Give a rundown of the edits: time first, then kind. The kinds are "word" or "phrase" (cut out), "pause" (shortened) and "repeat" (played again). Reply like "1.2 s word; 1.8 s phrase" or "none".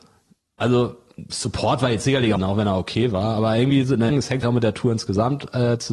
2.4 s phrase; 4.1 s word; 4.4 s word